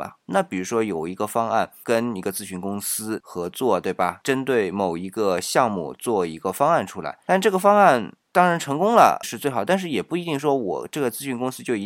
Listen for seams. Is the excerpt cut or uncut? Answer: cut